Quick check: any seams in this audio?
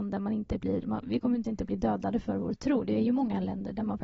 yes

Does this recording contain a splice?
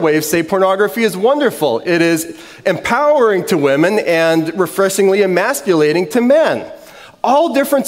no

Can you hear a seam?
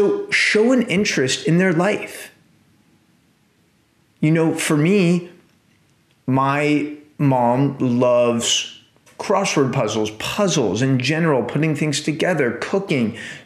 no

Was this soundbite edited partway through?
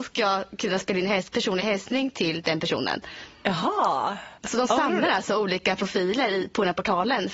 yes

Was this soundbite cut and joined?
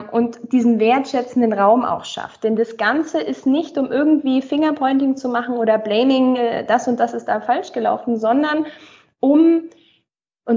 no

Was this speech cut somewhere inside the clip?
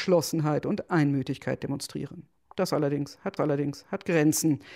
yes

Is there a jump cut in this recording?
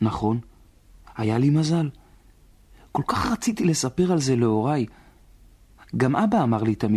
no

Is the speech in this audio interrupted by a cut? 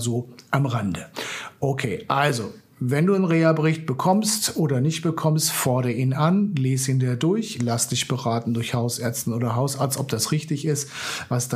no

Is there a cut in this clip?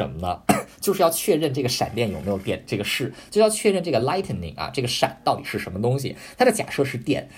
no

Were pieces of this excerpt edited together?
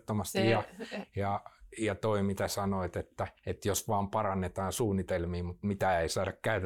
yes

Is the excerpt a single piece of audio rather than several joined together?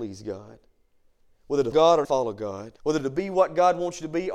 no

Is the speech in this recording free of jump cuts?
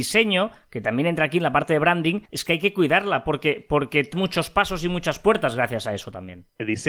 no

